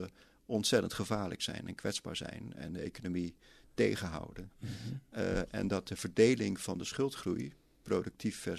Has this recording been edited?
no; 0 cuts

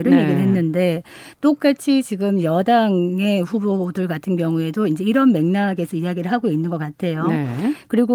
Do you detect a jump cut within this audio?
no; 0 cuts

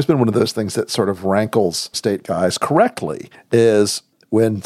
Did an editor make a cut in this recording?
yes; 1 cut; at 1.9 s

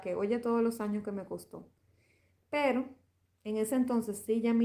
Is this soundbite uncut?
yes; 0 cuts

